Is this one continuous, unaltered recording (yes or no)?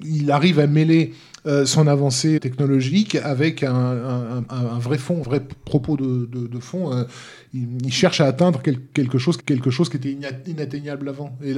no